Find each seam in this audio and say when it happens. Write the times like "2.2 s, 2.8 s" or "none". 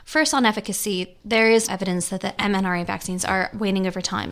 1.7 s